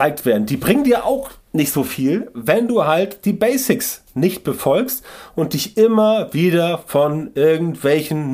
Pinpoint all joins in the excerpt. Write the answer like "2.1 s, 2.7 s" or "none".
1.4 s

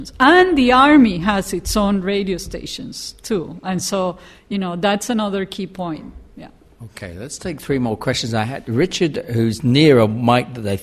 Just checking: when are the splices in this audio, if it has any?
none

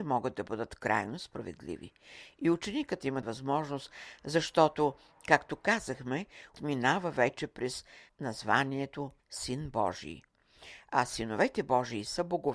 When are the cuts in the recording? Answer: 3.2 s, 6.5 s, 8.1 s, 9.2 s

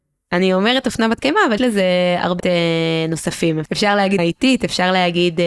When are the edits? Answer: 1.6 s, 2.4 s, 4.2 s

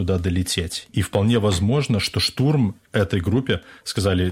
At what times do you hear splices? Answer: none

